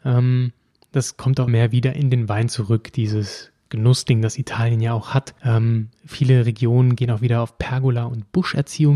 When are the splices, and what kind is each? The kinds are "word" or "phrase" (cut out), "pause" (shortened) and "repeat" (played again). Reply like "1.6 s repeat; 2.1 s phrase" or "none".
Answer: 1.5 s word; 5.4 s pause